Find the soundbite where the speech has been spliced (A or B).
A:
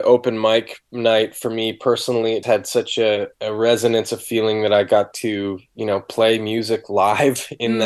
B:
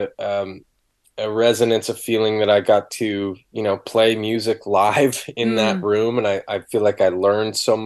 A